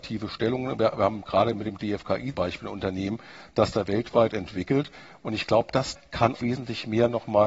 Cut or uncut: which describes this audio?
cut